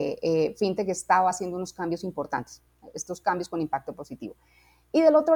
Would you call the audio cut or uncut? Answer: uncut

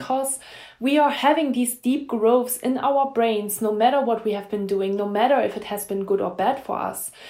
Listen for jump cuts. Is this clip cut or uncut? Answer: uncut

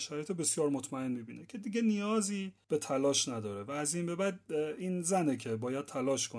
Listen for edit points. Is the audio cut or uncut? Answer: uncut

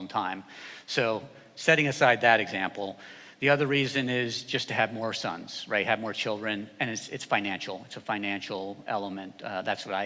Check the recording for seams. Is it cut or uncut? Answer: uncut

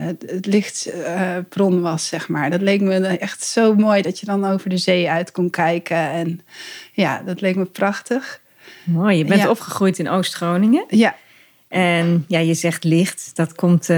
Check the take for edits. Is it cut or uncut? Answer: uncut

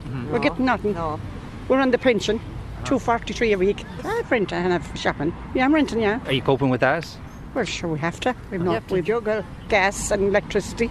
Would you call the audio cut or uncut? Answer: uncut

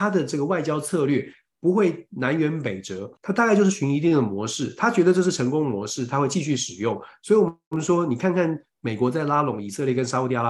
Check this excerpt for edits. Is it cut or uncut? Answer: cut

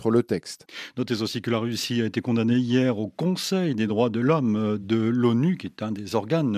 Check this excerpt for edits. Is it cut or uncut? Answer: uncut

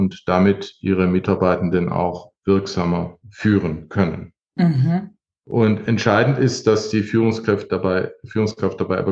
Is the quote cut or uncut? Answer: uncut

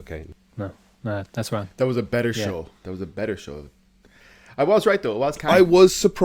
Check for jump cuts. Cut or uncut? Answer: cut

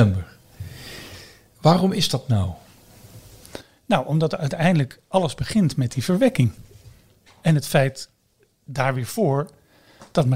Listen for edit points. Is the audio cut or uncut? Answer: uncut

